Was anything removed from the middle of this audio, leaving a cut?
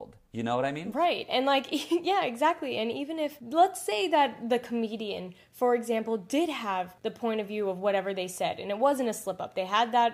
no; 0 cuts

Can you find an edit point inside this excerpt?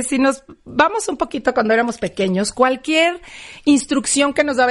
no; 0 cuts

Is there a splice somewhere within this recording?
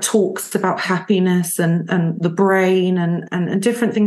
no; 0 cuts

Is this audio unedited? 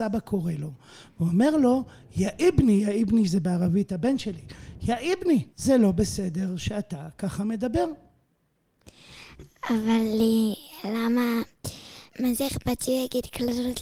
no; 2 cuts; at 5.5 s, 12.1 s

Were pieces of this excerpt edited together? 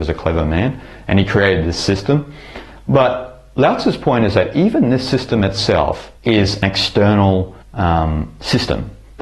yes; 2 cuts; at 6.2 s, 7.6 s

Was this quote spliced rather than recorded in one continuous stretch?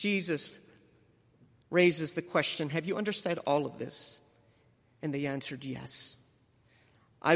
no; 0 cuts

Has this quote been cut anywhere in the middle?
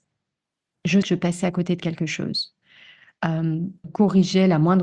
yes; 2 cuts; at 1.0 s, 3.8 s

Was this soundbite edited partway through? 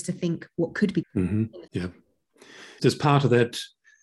yes; 3 cuts; at 1.0 s, 1.7 s, 2.8 s

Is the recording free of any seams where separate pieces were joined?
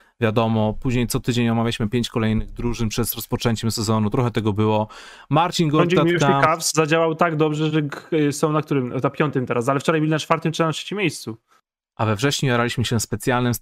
yes; 0 cuts

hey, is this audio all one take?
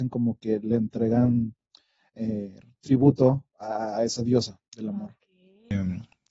yes; 0 cuts

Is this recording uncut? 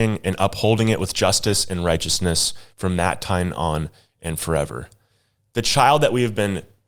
yes; 0 cuts

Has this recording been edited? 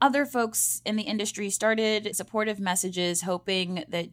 yes; 1 cut; at 2.1 s

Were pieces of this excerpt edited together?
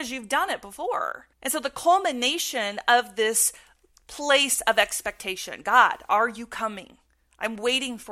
yes; 1 cut; at 1.3 s

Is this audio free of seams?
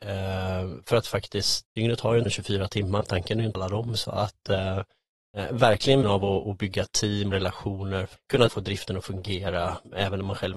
no; 9 cuts; at 1.6 s, 2.3 s, 3.0 s, 3.5 s, 6.0 s, 6.4 s, 7.3 s, 8.2 s, 8.5 s

